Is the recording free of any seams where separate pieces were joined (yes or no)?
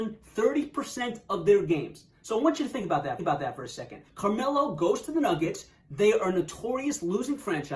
no